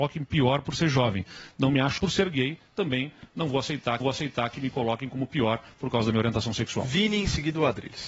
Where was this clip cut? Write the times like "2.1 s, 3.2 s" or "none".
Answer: 2.0 s, 4.0 s